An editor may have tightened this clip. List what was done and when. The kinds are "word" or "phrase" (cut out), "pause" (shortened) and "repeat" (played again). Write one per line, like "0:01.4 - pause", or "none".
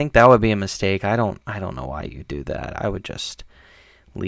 none